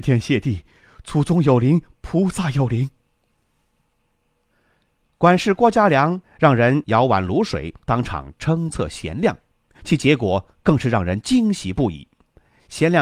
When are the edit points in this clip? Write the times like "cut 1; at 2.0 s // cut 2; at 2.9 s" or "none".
none